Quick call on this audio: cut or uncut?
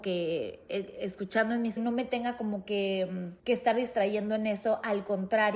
cut